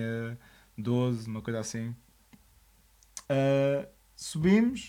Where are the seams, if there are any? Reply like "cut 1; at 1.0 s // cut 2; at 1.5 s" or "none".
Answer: cut 1; at 3.2 s